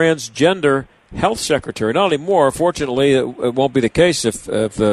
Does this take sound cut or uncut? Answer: uncut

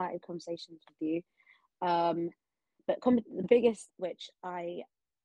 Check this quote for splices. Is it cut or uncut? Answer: cut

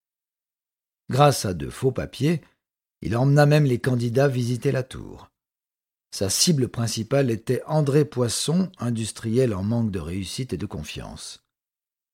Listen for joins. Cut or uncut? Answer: uncut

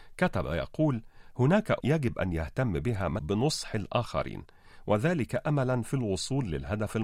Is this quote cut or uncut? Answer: cut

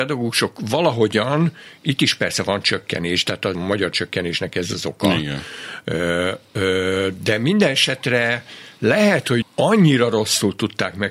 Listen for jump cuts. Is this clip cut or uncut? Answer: cut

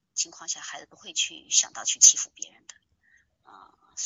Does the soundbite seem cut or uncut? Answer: uncut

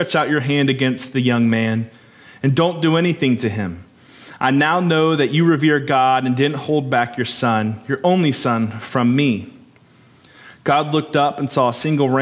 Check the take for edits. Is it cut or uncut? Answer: uncut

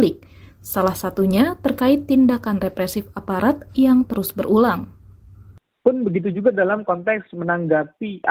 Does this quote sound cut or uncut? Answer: uncut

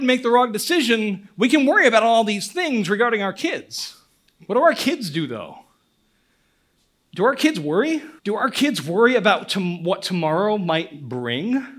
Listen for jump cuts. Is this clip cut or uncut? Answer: cut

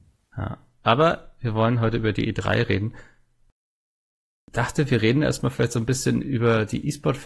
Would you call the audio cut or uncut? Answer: uncut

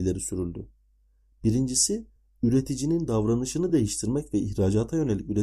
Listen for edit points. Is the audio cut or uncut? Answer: uncut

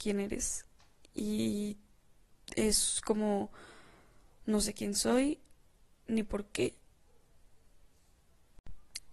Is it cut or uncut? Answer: uncut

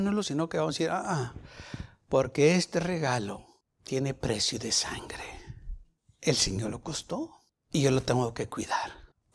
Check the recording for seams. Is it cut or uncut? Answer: uncut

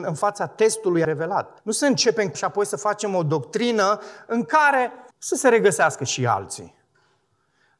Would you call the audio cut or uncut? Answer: cut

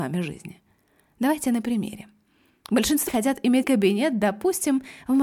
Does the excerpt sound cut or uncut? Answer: cut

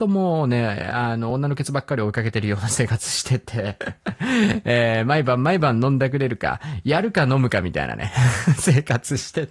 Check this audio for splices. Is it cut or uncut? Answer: uncut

